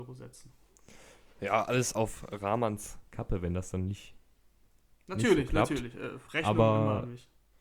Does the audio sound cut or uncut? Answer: uncut